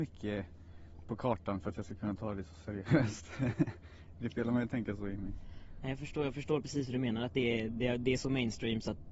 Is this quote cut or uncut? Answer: uncut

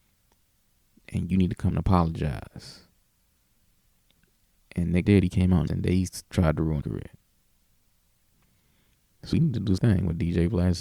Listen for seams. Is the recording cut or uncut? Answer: cut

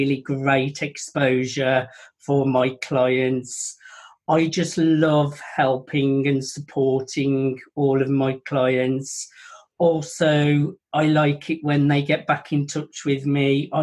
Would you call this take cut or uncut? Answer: uncut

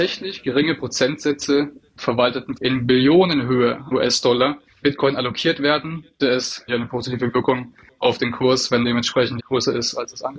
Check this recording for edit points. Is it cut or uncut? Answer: cut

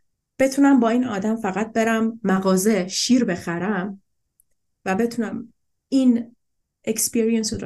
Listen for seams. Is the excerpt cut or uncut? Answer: uncut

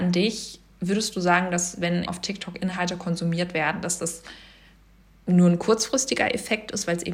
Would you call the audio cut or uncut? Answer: cut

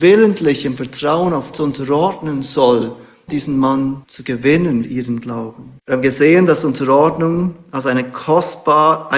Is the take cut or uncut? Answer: cut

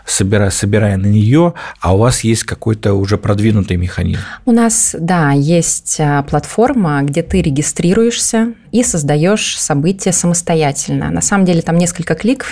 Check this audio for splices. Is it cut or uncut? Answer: uncut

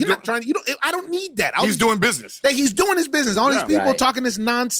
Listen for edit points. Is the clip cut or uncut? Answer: uncut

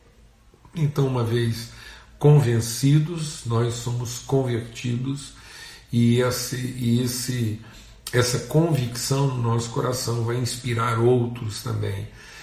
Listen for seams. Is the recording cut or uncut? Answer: uncut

